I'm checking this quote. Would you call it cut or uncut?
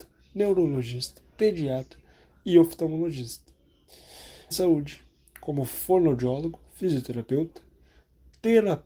cut